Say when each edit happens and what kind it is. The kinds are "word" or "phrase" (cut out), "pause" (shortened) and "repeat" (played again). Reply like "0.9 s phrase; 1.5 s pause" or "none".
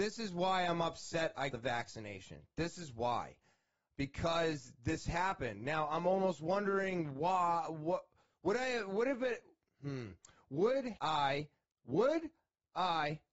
1.5 s word; 11.0 s word